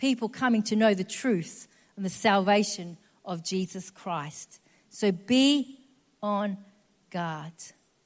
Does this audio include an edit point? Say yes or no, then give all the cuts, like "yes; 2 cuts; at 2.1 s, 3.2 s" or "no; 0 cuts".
no; 0 cuts